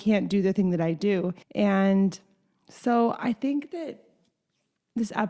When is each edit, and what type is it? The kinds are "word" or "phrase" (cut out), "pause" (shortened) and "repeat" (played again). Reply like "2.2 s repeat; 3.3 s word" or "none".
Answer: 1.4 s pause